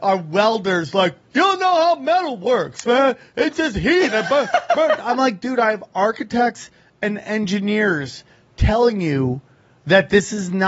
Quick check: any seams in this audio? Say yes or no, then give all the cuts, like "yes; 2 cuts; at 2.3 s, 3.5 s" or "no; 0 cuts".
no; 0 cuts